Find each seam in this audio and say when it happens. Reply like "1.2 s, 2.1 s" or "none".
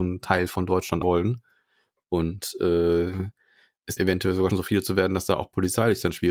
1.0 s, 4.0 s, 4.5 s

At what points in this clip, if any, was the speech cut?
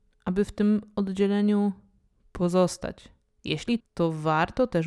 3.8 s

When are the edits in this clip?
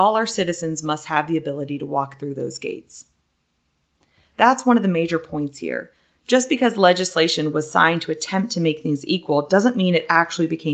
none

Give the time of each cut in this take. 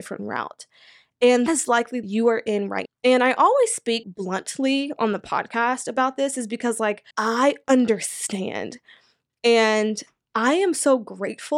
1.5 s, 2.0 s, 2.9 s, 4.0 s, 7.1 s

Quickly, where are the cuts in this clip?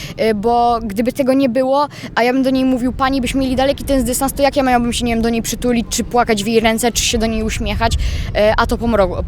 none

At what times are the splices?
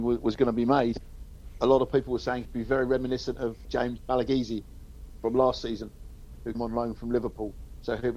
1.6 s, 2.4 s, 3.6 s, 6.5 s

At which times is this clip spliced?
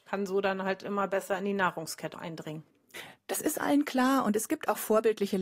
2.1 s

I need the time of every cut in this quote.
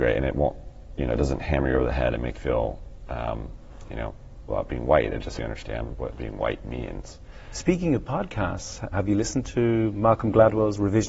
2.3 s, 4.5 s, 5.4 s, 8.9 s

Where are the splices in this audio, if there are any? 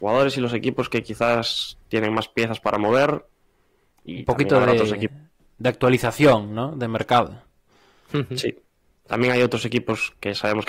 none

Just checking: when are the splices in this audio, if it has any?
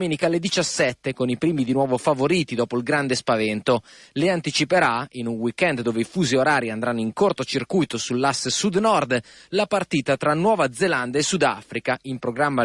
none

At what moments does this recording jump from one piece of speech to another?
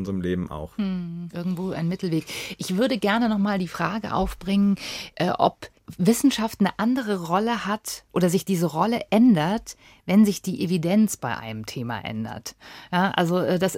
none

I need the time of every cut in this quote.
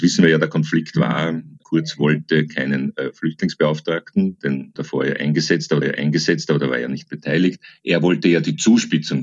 4.8 s, 5.8 s

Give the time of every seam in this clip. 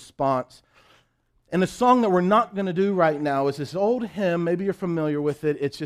none

